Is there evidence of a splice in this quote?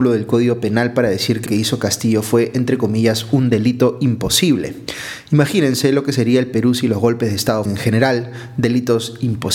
yes; 2 cuts; at 1.5 s, 7.7 s

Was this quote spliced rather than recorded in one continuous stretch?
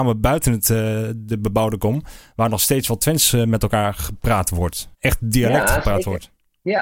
yes; 1 cut; at 4.9 s

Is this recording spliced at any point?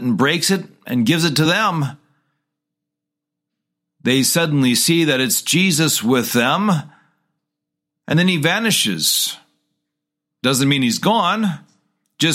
no; 0 cuts

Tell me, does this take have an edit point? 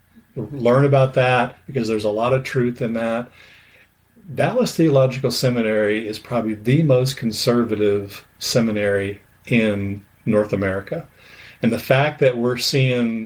yes; 1 cut; at 9.3 s

